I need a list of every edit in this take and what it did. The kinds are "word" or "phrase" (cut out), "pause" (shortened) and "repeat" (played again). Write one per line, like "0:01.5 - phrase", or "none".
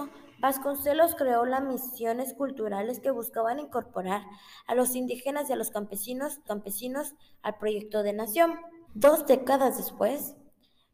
0:06.5 - repeat
0:08.8 - pause

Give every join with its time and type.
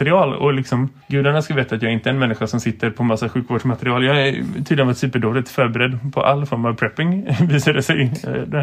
0:01.0 - pause

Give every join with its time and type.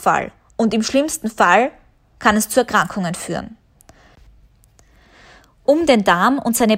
none

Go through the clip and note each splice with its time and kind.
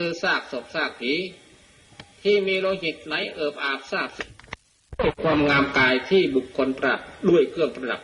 0:02.1 - pause

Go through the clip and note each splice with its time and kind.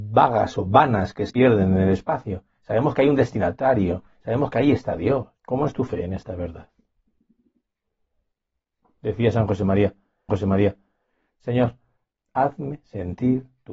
0:01.3 - word
0:05.4 - pause
0:10.3 - repeat

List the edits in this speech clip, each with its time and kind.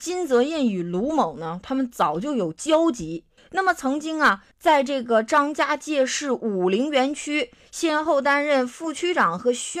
0:03.4 - pause
0:04.5 - pause

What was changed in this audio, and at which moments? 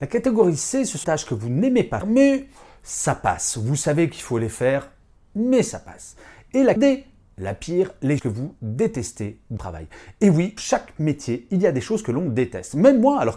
0:01.0 - word
0:02.0 - word
0:06.8 - word
0:08.2 - word
0:09.6 - word
0:10.6 - word

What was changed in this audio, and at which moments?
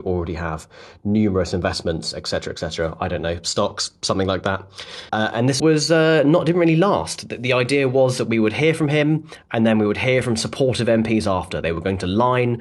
0:05.1 - pause
0:05.6 - word

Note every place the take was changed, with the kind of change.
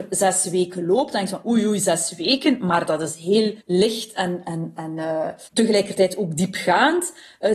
0:03.6 - pause
0:05.5 - pause

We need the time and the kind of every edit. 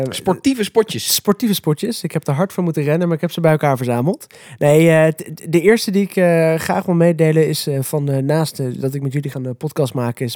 0:09.3 - word

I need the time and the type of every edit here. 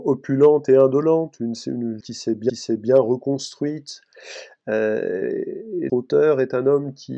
0:02.0 - word
0:02.5 - repeat
0:05.9 - word

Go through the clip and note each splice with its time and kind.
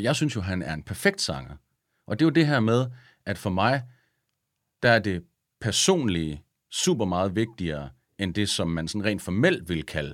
none

